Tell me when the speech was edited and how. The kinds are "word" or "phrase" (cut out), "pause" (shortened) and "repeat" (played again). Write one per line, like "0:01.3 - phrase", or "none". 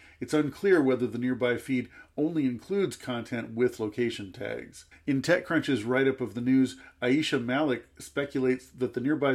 0:04.9 - pause